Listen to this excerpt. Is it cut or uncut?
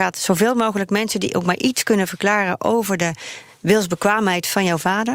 uncut